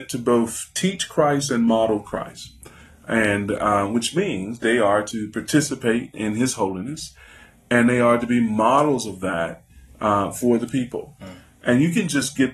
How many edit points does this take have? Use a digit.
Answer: 0